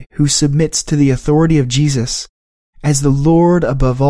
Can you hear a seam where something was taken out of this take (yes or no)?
no